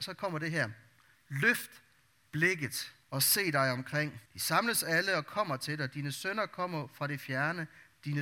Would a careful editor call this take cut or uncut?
cut